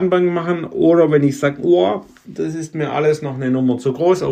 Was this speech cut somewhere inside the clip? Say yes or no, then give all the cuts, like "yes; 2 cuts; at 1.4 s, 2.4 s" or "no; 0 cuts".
no; 0 cuts